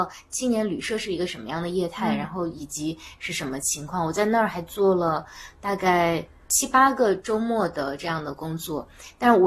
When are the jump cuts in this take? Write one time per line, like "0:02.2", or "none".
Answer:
0:06.3